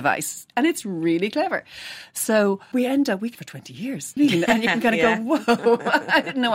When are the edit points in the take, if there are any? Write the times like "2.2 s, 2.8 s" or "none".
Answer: 2.7 s, 3.3 s, 4.2 s